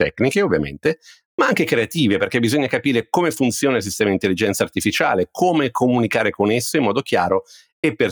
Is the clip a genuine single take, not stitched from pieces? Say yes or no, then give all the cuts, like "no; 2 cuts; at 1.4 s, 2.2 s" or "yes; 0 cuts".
yes; 0 cuts